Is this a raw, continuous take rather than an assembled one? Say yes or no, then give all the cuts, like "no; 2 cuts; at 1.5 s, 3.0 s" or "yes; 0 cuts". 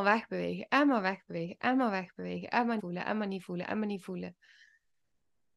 no; 1 cut; at 2.8 s